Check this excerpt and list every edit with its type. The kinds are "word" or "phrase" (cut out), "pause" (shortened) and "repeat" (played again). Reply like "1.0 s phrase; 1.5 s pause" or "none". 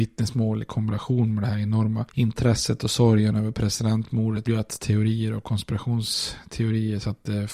4.5 s word